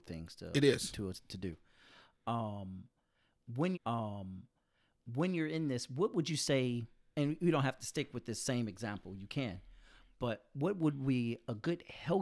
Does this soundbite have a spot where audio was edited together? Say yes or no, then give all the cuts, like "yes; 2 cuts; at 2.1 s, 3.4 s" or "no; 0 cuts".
yes; 1 cut; at 3.7 s